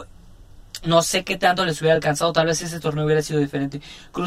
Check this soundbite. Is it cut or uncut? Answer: uncut